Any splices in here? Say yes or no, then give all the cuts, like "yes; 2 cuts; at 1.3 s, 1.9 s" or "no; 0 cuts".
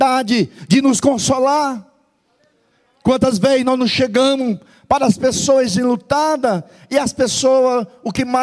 no; 0 cuts